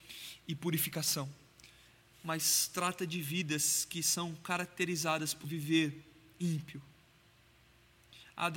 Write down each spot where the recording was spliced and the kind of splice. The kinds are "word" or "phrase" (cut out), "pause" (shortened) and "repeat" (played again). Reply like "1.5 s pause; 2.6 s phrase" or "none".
5.4 s word